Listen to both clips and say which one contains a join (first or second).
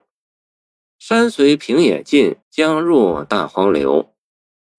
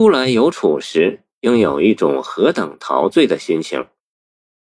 first